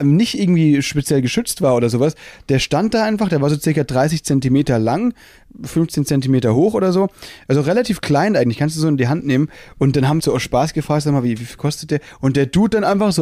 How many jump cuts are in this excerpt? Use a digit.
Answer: 1